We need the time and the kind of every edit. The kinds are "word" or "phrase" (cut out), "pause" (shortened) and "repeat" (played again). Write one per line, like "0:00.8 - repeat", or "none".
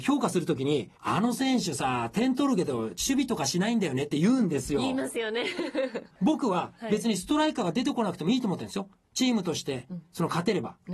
0:01.0 - pause